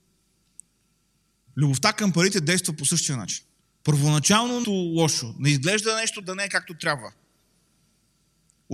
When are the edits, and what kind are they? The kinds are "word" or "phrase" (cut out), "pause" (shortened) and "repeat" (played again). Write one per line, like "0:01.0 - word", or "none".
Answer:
0:03.6 - pause
0:04.6 - phrase
0:06.2 - word